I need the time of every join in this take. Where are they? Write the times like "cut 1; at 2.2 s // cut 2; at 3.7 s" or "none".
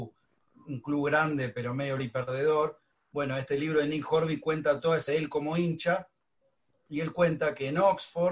cut 1; at 2.0 s // cut 2; at 5.1 s